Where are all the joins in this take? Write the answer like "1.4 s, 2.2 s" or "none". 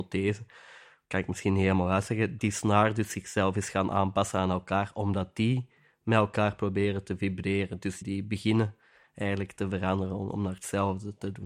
2.4 s, 8.0 s